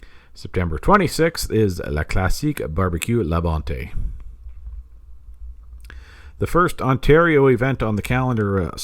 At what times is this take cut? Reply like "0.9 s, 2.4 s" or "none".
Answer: none